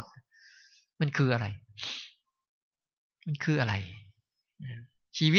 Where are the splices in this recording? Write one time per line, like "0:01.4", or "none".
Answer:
none